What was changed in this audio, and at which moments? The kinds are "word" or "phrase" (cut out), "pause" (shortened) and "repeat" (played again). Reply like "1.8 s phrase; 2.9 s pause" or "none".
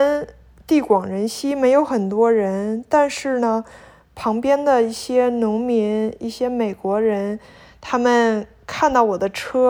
none